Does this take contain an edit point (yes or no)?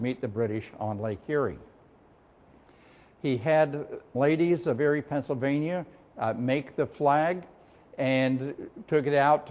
yes